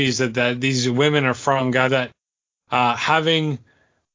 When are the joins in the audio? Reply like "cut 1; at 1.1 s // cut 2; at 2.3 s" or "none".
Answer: cut 1; at 1.9 s